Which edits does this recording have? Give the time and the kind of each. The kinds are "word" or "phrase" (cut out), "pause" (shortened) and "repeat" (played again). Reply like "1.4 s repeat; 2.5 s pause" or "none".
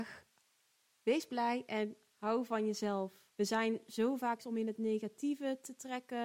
3.3 s pause; 4.4 s word